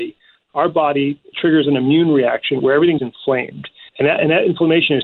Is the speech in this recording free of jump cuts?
no; 3 cuts; at 2.6 s, 3.0 s, 3.9 s

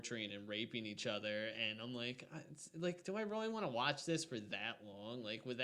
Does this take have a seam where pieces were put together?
no; 0 cuts

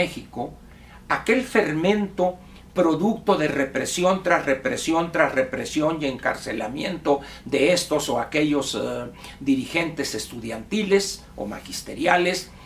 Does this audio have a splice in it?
no; 0 cuts

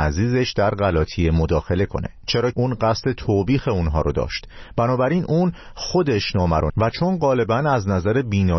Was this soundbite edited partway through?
yes; 2 cuts; at 2.5 s, 6.7 s

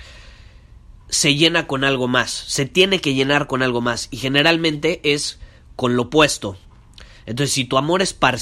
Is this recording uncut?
no; 1 cut; at 1.0 s

